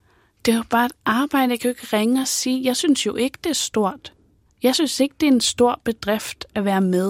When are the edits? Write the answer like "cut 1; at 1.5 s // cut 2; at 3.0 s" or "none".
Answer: none